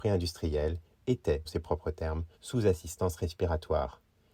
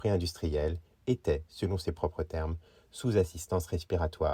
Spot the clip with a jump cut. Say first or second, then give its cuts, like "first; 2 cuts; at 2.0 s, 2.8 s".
first; 2 cuts; at 1.5 s, 2.3 s